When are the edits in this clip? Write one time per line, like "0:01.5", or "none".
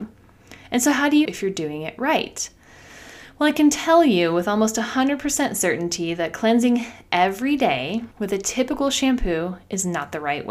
0:01.3
0:08.1